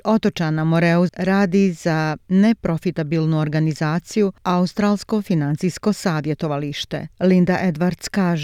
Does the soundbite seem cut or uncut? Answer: cut